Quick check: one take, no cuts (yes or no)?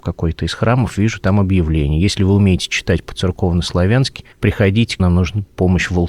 no